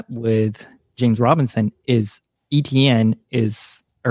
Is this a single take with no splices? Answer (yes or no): no